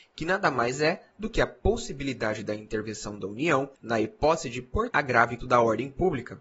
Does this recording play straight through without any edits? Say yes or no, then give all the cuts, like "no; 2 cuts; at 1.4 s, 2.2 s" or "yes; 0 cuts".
no; 3 cuts; at 3.7 s, 4.9 s, 5.4 s